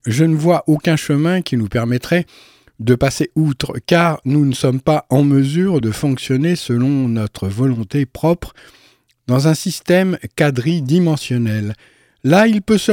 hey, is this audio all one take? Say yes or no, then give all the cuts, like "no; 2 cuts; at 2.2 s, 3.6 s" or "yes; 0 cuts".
yes; 0 cuts